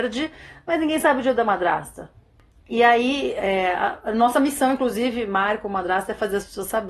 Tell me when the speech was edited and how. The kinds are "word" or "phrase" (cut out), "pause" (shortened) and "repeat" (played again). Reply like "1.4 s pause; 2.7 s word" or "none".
none

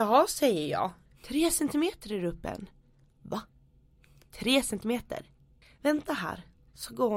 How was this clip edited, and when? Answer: none

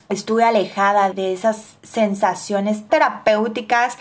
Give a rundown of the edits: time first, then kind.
1.1 s word; 2.9 s word

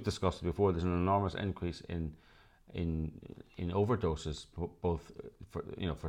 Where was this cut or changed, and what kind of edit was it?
none

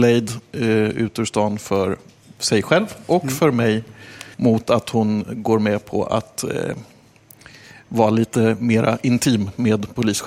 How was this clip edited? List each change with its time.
4.3 s pause

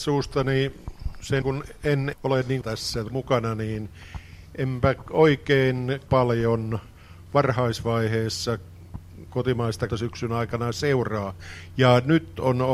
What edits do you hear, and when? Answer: 1.4 s word; 2.1 s word; 2.6 s phrase; 3.1 s word; 6.1 s word; 9.9 s word

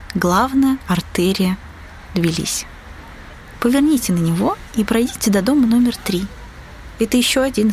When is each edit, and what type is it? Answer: none

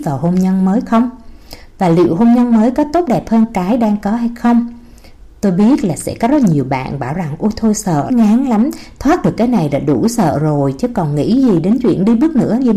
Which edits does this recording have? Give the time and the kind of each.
8.1 s word

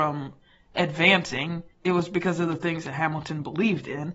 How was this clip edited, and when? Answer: 1.7 s pause

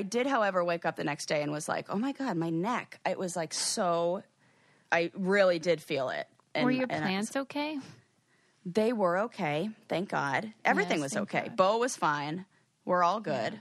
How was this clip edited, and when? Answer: none

